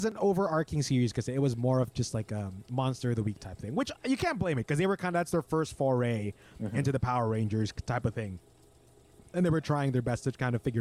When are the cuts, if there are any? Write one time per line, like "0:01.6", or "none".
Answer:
none